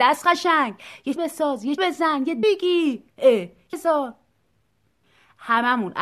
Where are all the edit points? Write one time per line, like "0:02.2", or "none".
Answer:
0:01.2
0:01.8
0:02.4
0:03.1
0:03.7